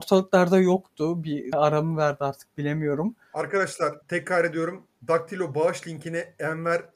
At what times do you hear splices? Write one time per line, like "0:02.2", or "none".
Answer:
0:01.5
0:04.0